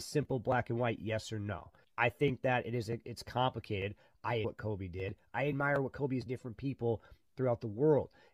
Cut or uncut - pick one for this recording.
cut